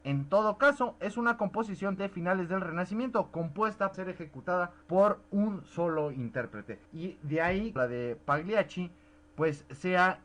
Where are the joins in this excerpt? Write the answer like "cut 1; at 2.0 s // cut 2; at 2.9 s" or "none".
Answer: cut 1; at 2.0 s // cut 2; at 3.9 s // cut 3; at 4.8 s // cut 4; at 6.8 s // cut 5; at 7.8 s